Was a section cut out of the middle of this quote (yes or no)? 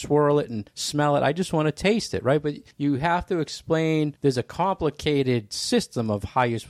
no